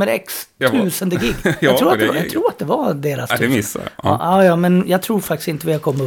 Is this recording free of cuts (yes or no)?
yes